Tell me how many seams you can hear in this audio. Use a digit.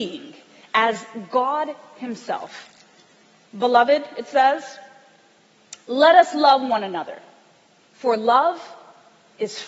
0